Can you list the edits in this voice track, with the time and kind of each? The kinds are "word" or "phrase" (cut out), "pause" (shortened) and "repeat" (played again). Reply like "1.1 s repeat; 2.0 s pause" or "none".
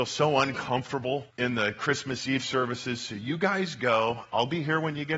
1.3 s pause